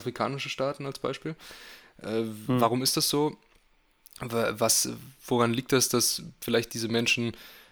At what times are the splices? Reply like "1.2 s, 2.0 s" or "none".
none